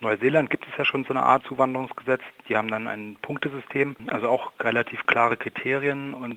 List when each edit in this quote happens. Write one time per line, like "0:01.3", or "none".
0:01.4